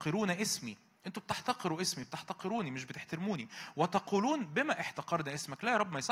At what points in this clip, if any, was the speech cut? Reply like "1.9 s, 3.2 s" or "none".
none